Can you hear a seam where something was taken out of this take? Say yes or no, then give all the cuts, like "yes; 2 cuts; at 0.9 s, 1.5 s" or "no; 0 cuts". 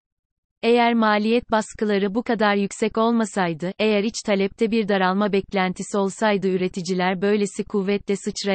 no; 0 cuts